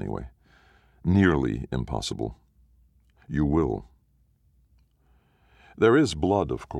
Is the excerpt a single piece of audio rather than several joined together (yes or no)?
yes